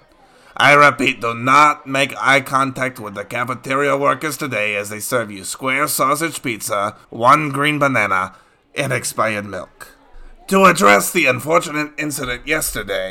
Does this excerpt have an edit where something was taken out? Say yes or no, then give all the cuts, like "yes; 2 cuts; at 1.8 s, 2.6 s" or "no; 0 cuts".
yes; 1 cut; at 7.0 s